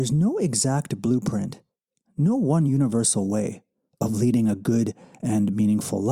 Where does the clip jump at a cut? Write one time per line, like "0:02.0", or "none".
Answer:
none